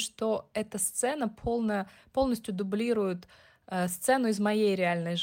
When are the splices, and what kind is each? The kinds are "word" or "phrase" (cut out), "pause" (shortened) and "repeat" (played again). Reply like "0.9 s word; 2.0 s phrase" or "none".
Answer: none